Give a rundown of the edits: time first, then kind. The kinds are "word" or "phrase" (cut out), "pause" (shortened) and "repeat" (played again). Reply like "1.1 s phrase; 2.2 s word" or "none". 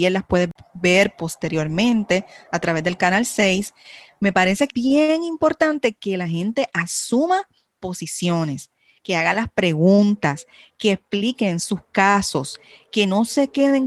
4.7 s word